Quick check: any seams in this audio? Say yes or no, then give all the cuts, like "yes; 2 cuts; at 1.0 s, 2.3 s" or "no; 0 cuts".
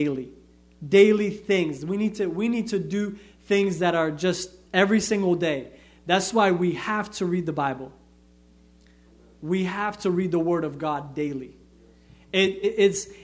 no; 0 cuts